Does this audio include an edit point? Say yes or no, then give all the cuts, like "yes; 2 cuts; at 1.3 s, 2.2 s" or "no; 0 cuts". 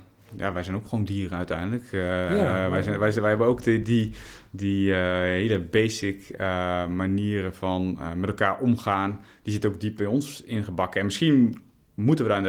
no; 0 cuts